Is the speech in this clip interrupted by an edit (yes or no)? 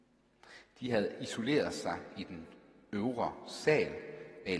no